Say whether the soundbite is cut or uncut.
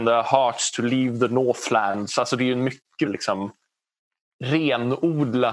cut